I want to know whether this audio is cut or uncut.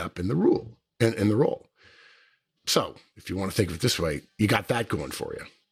uncut